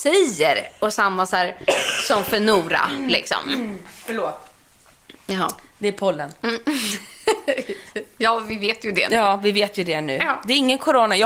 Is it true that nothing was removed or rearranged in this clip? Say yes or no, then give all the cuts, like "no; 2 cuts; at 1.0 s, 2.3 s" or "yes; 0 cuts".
yes; 0 cuts